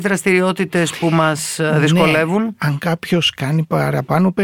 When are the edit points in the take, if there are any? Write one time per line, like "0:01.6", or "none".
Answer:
none